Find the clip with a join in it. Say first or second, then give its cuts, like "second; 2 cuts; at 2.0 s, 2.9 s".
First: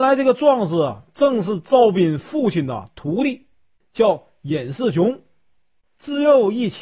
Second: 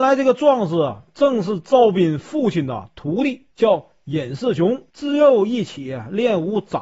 second; 2 cuts; at 3.5 s, 4.9 s